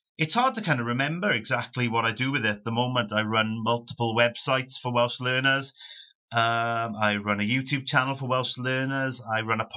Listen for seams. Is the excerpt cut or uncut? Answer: uncut